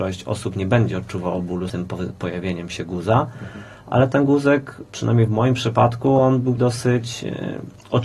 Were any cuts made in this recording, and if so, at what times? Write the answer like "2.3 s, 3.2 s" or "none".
1.7 s, 6.6 s